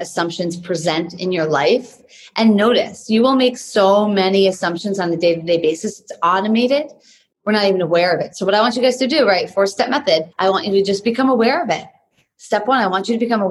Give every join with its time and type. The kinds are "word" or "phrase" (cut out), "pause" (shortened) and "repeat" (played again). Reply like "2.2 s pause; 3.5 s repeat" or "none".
10.3 s pause